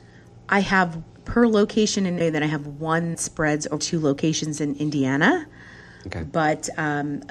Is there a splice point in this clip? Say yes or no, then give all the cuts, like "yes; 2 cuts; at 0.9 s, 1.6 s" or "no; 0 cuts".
yes; 4 cuts; at 1.1 s, 2.2 s, 3.1 s, 3.8 s